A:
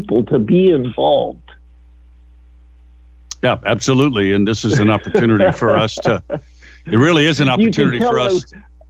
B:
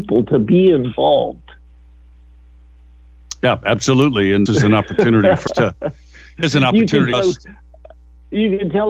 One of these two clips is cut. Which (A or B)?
B